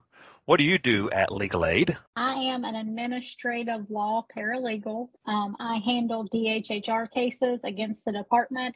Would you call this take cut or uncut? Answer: cut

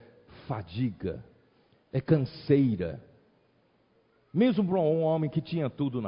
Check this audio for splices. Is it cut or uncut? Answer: uncut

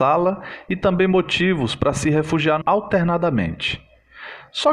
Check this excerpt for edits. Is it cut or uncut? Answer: cut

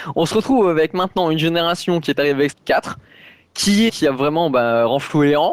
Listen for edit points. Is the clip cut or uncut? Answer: cut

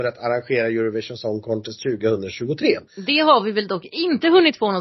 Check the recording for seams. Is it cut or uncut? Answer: cut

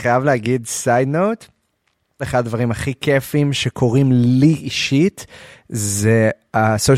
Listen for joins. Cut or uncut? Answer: uncut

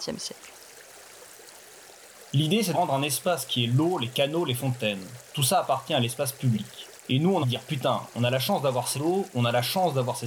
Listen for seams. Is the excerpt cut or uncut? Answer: cut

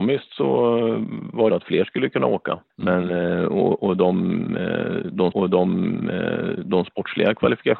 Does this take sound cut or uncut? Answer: cut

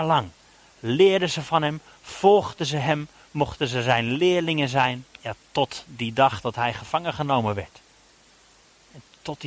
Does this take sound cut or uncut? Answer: cut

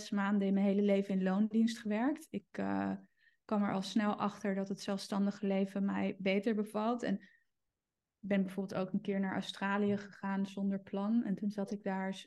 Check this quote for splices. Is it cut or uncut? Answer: uncut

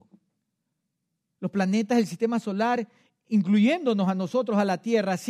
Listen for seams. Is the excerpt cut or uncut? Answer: uncut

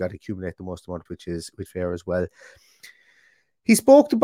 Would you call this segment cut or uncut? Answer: cut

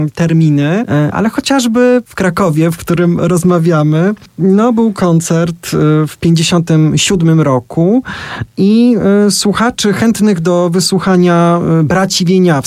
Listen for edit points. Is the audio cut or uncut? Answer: cut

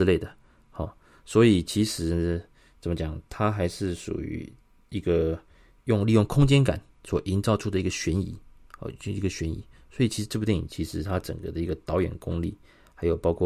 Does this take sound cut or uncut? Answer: uncut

